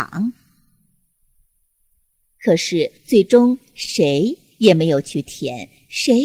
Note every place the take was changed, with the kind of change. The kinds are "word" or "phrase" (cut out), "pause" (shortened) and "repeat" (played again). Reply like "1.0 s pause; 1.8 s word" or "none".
3.0 s pause